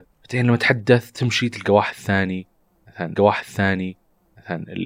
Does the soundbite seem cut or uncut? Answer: cut